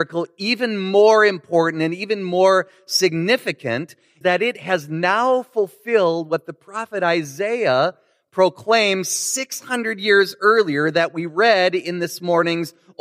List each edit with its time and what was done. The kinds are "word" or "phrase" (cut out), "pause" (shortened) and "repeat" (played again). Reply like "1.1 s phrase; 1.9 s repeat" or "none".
4.2 s word